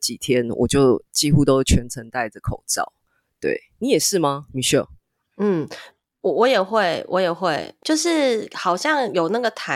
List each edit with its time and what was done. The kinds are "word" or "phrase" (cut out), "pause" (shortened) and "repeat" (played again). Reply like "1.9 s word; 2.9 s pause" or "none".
none